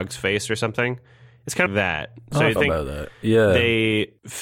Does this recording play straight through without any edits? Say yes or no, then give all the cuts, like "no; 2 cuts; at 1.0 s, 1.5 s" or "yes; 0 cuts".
no; 2 cuts; at 1.7 s, 2.6 s